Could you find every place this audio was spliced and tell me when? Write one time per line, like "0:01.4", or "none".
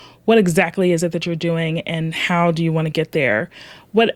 none